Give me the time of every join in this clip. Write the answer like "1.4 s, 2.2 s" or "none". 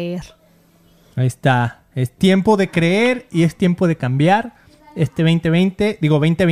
none